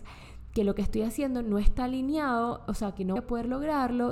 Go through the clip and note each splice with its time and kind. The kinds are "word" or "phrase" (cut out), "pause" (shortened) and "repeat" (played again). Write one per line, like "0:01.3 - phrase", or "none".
0:03.2 - word